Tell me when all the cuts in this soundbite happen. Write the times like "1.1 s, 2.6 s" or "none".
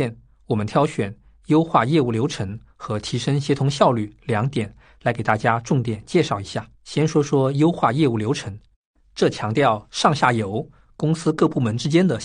6.8 s